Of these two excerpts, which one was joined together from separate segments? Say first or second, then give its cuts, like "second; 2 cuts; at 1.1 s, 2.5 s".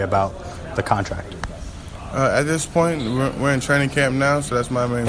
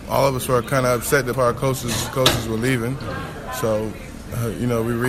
second; 2 cuts; at 1.3 s, 2.1 s